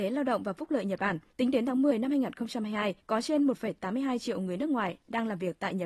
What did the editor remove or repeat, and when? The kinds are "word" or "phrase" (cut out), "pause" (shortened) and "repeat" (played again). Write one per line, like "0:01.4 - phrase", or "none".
0:01.3 - pause
0:03.0 - pause